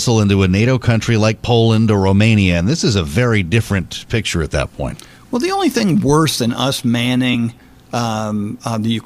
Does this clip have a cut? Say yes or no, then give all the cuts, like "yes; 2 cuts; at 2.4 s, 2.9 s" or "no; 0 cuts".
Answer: no; 0 cuts